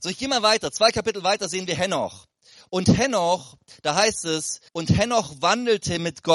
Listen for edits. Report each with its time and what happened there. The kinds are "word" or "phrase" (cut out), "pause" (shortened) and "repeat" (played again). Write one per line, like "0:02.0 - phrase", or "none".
0:04.7 - pause